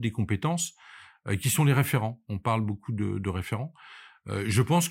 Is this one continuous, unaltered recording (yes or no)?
yes